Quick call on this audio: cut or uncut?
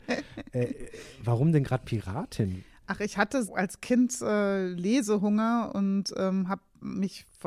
cut